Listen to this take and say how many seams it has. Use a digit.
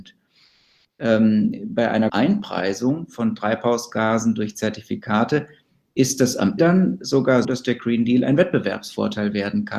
3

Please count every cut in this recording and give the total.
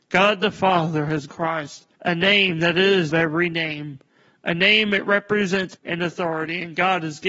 4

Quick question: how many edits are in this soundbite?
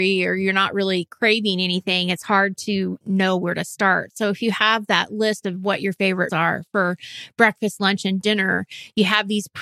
2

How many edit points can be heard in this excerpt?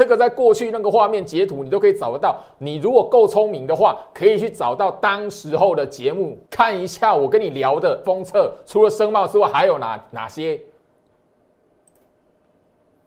2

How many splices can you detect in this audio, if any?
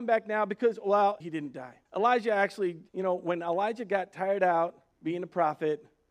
4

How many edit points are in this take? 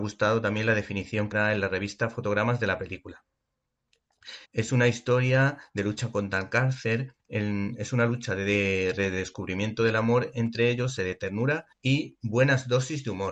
5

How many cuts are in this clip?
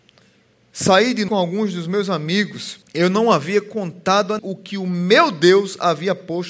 3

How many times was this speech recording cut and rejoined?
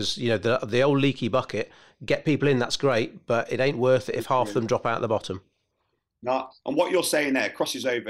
0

